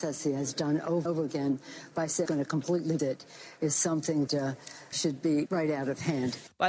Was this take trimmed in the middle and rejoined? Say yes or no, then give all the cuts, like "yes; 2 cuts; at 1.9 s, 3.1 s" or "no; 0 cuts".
yes; 6 cuts; at 1.0 s, 2.2 s, 3.0 s, 4.3 s, 4.9 s, 5.5 s